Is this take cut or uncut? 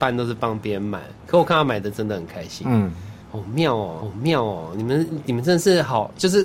cut